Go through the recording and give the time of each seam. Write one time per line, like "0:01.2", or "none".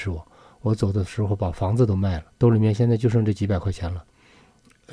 0:02.3